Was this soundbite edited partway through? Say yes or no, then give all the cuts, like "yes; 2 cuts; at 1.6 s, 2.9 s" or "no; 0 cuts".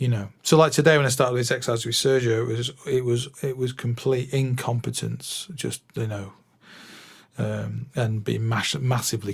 yes; 2 cuts; at 3.3 s, 7.9 s